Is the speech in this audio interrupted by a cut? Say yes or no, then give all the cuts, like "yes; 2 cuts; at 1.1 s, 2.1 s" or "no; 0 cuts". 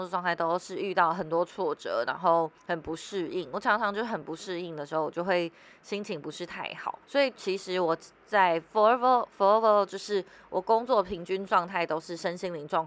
yes; 2 cuts; at 2.6 s, 7.0 s